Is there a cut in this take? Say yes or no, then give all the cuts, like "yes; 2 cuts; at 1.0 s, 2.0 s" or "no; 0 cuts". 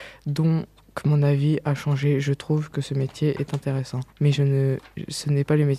yes; 1 cut; at 4.1 s